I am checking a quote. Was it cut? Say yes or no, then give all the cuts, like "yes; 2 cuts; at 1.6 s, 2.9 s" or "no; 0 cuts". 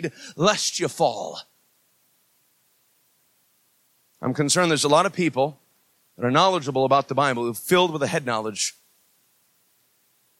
no; 0 cuts